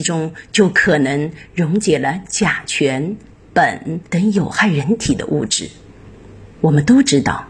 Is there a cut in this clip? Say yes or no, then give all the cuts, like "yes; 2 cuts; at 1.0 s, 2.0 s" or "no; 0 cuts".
yes; 2 cuts; at 4.1 s, 6.5 s